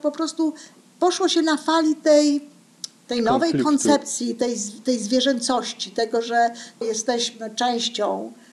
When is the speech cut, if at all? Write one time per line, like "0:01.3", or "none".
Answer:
0:06.8